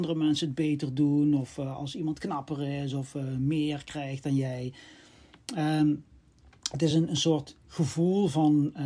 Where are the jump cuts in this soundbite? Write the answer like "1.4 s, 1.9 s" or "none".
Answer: none